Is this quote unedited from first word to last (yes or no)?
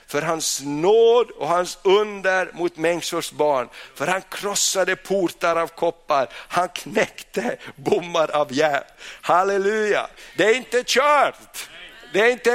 yes